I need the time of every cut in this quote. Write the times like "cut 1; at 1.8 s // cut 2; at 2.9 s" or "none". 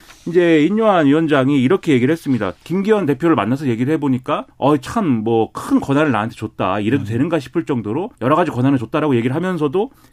cut 1; at 2.6 s // cut 2; at 4.5 s // cut 3; at 8.1 s